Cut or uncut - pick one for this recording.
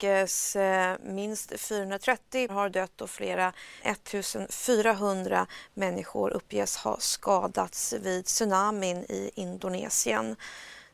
cut